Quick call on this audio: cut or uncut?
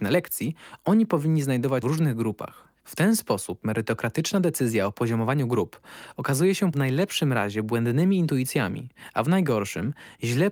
cut